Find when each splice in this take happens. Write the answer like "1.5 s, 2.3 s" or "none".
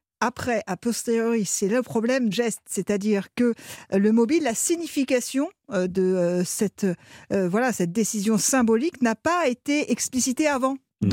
2.3 s